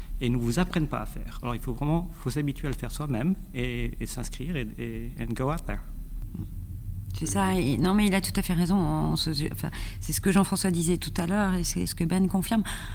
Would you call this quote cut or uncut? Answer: cut